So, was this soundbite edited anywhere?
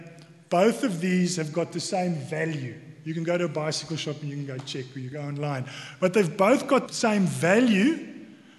yes; 2 cuts; at 5.1 s, 6.9 s

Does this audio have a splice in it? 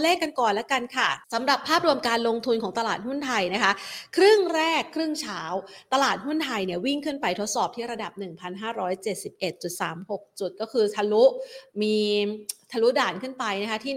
yes; 1 cut; at 1.2 s

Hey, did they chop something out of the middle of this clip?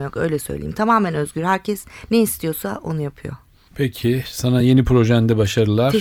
no; 0 cuts

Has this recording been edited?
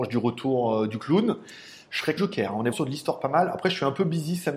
yes; 2 cuts; at 2.2 s, 2.7 s

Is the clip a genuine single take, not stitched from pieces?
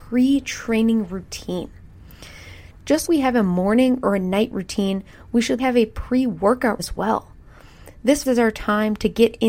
no; 4 cuts; at 3.1 s, 5.6 s, 6.8 s, 8.3 s

